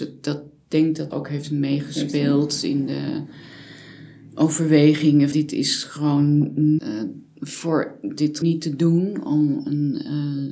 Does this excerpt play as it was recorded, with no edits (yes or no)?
no